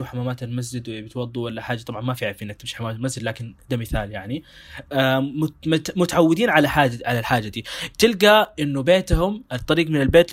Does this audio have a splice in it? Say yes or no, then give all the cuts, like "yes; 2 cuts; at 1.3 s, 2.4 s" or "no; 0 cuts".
no; 0 cuts